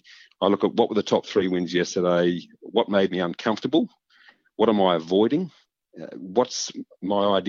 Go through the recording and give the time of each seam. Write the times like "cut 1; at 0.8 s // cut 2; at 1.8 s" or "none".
none